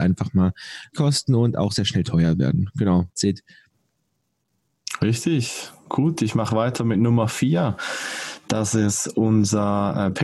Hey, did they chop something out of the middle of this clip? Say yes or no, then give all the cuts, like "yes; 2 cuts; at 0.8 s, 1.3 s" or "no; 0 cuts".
yes; 2 cuts; at 0.9 s, 3.2 s